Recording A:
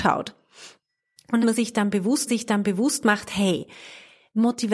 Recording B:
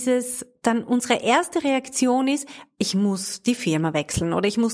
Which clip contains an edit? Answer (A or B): A